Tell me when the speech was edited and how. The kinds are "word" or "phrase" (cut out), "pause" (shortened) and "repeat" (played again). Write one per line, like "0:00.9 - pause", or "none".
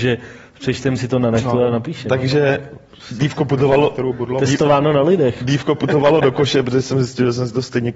none